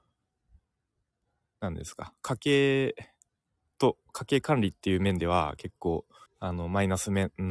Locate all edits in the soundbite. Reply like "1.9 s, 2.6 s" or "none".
3.3 s, 6.3 s

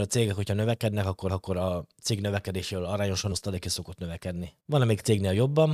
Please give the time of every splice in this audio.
1.3 s, 3.3 s, 4.6 s

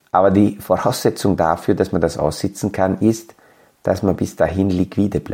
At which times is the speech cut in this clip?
none

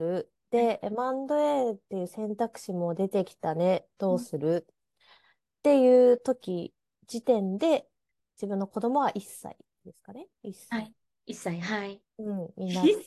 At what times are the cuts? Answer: none

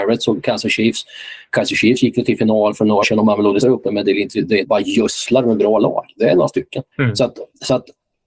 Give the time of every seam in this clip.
3.0 s, 3.6 s, 4.6 s, 6.9 s

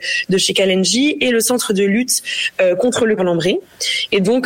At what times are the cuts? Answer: 3.2 s

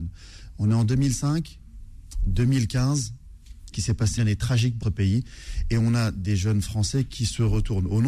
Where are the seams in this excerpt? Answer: 3.7 s, 4.2 s, 4.8 s

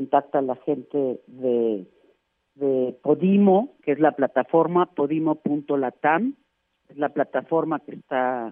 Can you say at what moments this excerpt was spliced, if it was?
none

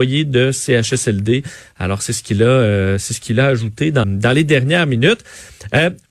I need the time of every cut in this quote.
4.0 s

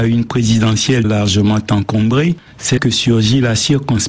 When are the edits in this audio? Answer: 1.0 s, 2.8 s

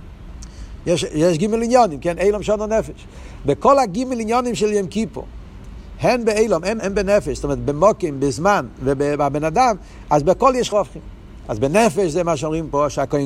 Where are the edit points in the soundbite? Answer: 6.8 s, 10.7 s

